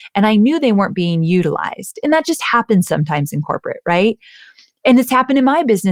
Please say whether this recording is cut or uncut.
uncut